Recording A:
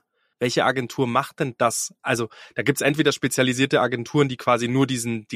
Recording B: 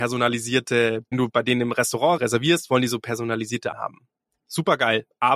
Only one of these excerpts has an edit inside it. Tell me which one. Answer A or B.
B